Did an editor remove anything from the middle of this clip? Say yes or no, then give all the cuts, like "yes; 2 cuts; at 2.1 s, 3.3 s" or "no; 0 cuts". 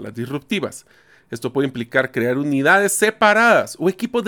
no; 0 cuts